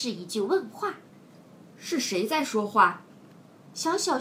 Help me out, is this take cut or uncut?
uncut